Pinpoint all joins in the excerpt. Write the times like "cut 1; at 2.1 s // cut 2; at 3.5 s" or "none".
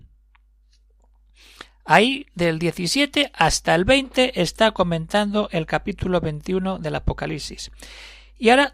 none